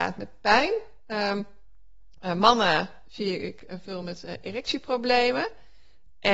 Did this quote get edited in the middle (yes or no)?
no